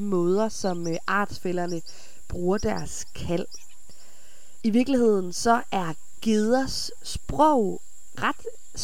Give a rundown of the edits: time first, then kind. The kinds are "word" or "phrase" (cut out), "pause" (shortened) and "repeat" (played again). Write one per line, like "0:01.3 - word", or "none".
none

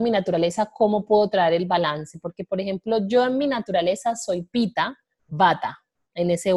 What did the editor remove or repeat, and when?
none

